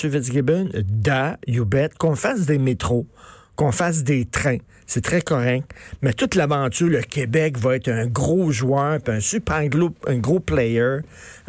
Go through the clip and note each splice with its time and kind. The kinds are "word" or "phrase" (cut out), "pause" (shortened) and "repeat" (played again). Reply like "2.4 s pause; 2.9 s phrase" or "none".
none